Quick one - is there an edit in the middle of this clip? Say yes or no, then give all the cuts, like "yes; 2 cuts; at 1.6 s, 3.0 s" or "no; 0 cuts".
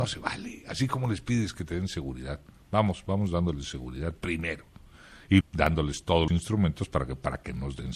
yes; 2 cuts; at 5.4 s, 6.3 s